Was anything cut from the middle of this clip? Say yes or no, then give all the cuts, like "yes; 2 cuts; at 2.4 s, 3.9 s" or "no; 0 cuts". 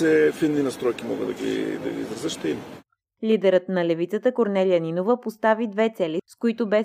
no; 0 cuts